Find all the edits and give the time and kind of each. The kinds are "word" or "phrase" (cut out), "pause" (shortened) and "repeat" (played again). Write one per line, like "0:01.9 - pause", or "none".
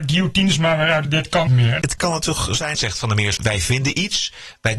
0:01.0 - phrase
0:01.5 - phrase
0:02.7 - phrase
0:03.4 - word